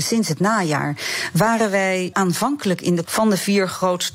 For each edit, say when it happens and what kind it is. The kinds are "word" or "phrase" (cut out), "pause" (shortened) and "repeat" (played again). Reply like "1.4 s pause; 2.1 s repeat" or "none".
2.1 s word; 3.0 s word